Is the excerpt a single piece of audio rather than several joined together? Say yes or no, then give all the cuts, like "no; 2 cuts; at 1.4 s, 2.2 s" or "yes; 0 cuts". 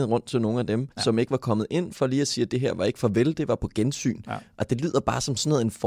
no; 1 cut; at 0.9 s